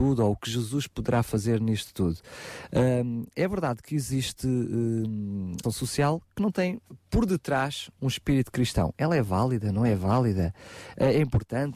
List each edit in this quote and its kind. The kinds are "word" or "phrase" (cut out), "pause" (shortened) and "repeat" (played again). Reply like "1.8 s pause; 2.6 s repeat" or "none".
5.6 s word